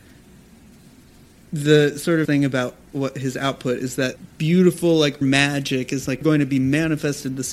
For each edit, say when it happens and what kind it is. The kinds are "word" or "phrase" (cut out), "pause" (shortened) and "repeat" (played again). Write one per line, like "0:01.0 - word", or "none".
0:02.2 - word
0:04.3 - pause
0:05.2 - word
0:06.2 - phrase